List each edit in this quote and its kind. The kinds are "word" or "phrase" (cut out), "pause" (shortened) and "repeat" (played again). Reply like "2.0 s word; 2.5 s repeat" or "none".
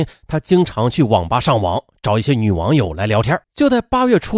3.4 s pause